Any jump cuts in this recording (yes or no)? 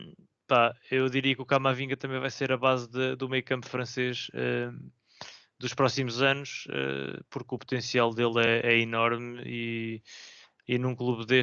no